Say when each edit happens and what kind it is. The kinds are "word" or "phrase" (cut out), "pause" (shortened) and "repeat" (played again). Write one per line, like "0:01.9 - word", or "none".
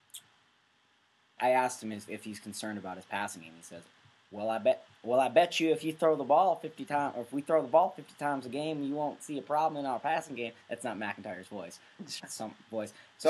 0:01.4 - word
0:12.2 - word